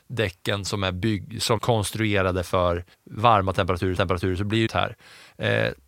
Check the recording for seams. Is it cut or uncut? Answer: cut